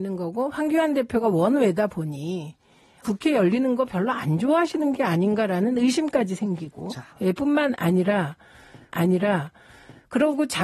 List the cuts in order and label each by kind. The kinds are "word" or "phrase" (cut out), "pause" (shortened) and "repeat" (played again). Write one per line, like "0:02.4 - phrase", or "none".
0:03.0 - word
0:07.1 - pause
0:08.9 - repeat